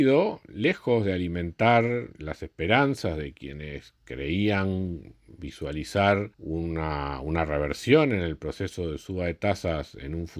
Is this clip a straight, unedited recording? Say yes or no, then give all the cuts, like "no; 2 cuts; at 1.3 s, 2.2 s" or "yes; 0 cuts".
no; 2 cuts; at 4.0 s, 6.3 s